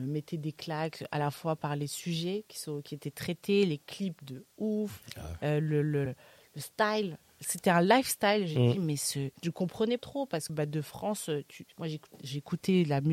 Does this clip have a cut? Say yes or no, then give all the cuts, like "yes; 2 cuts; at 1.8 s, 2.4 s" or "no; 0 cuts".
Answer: yes; 5 cuts; at 6.1 s, 9.4 s, 10.0 s, 10.5 s, 11.7 s